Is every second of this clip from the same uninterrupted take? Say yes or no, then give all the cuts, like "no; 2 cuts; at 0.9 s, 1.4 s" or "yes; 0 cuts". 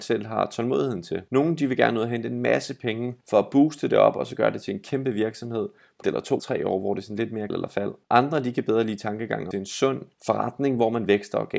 no; 8 cuts; at 1.3 s, 3.2 s, 6.0 s, 6.4 s, 7.5 s, 8.0 s, 9.5 s, 10.1 s